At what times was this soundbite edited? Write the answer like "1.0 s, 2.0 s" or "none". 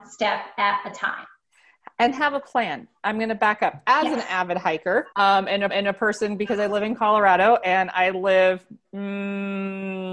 5.1 s, 5.7 s